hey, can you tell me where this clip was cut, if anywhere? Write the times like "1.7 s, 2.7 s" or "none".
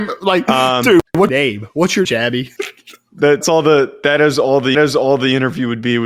1.1 s, 2.0 s, 2.6 s, 3.4 s, 4.7 s

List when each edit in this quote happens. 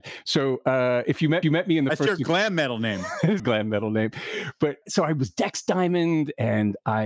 1.4 s, 3.4 s, 4.8 s

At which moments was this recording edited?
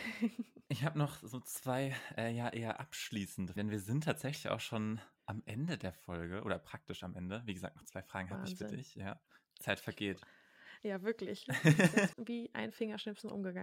3.6 s, 12.1 s

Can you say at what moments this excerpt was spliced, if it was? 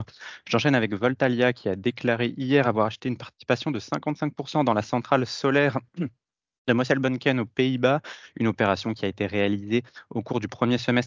none

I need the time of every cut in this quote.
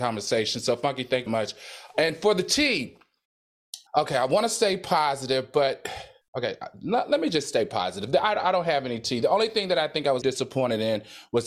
1.3 s, 3.9 s, 6.2 s, 10.2 s

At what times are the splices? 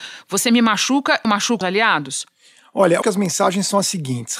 1.2 s, 1.6 s, 3.0 s

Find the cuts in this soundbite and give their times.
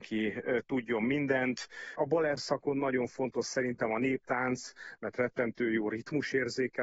none

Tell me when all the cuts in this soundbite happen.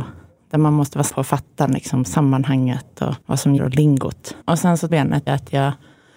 1.1 s, 3.2 s, 3.6 s, 4.4 s, 4.9 s, 5.3 s

